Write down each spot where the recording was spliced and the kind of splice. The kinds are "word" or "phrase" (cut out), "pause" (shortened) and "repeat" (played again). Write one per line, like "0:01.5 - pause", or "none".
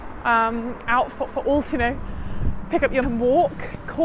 0:01.3 - repeat
0:01.7 - word
0:03.0 - word